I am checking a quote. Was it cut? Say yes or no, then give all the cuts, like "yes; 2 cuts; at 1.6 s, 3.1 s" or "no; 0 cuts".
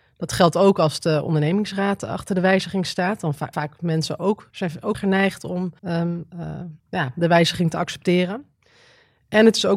yes; 5 cuts; at 3.5 s, 4.5 s, 4.9 s, 5.8 s, 6.8 s